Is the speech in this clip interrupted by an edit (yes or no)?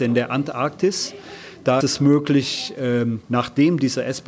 yes